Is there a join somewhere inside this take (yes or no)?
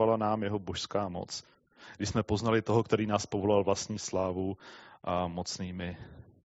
no